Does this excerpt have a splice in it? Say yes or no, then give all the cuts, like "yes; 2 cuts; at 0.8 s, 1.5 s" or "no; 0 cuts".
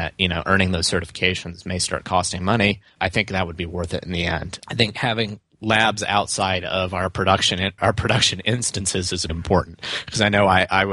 yes; 4 cuts; at 3.0 s, 4.6 s, 7.8 s, 9.3 s